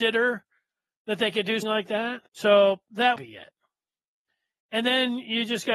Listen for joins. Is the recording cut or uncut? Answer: cut